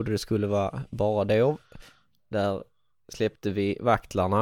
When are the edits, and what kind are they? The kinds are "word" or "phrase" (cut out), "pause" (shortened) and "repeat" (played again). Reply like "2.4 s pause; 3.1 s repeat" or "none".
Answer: none